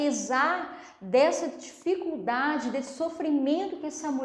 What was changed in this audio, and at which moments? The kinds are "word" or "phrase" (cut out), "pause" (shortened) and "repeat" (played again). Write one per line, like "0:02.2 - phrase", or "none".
none